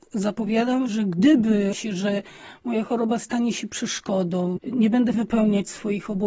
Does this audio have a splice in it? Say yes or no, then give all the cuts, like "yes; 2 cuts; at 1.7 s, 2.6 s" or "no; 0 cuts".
yes; 3 cuts; at 1.7 s, 4.6 s, 5.1 s